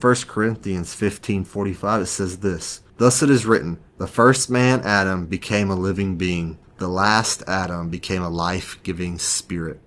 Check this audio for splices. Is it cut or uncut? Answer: cut